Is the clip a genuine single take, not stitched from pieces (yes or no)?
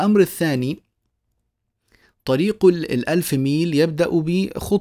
yes